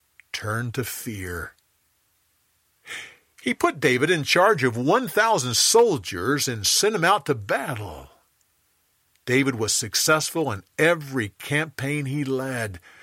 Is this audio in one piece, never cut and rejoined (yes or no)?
yes